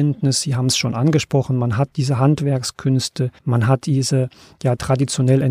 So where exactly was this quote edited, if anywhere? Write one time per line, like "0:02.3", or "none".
0:03.4